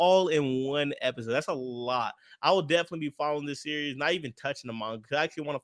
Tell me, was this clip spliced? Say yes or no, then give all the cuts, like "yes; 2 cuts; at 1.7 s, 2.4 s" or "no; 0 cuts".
no; 0 cuts